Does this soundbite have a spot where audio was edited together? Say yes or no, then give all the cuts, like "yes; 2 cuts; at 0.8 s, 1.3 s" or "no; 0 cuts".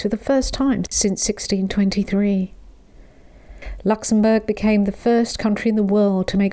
no; 0 cuts